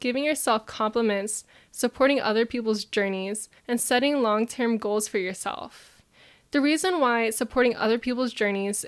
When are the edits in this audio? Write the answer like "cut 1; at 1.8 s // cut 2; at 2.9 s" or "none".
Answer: cut 1; at 3.6 s